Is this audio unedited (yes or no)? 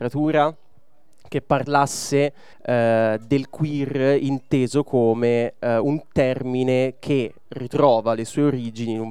no